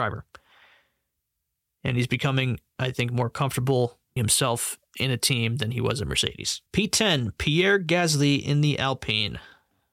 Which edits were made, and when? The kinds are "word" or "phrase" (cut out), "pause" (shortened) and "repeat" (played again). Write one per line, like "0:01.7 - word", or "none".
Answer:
0:04.2 - word
0:06.7 - pause